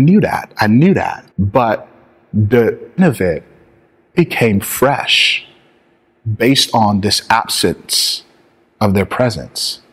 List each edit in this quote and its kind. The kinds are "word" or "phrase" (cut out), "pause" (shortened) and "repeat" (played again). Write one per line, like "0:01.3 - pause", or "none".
0:01.3 - pause
0:03.0 - word
0:04.1 - word